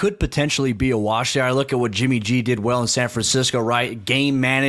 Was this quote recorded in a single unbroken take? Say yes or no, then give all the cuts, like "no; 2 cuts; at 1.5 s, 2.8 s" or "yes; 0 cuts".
yes; 0 cuts